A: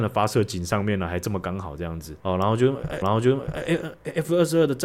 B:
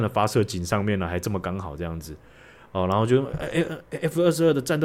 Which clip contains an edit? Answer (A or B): A